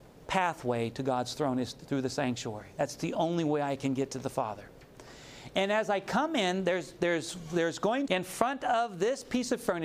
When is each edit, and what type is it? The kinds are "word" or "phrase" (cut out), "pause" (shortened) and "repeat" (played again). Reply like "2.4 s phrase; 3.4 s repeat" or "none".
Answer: 8.1 s phrase